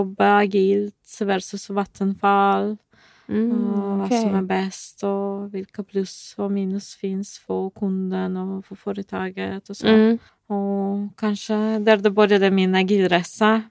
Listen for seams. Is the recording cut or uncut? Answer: cut